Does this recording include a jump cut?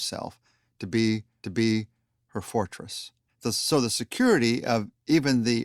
yes; 2 cuts; at 1.4 s, 3.3 s

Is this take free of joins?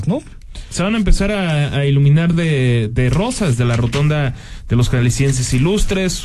yes; 0 cuts

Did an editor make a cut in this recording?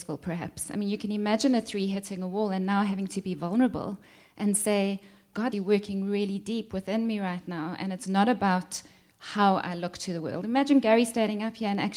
yes; 1 cut; at 5.5 s

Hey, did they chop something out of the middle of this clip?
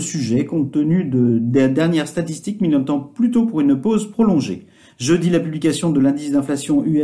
no; 0 cuts

